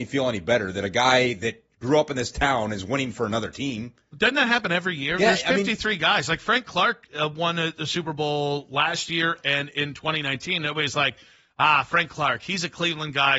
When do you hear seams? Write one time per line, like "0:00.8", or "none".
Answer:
none